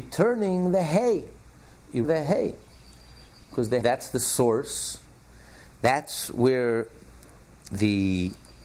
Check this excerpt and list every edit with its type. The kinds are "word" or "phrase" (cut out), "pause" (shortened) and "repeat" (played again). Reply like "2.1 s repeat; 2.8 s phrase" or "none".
2.0 s word; 3.8 s word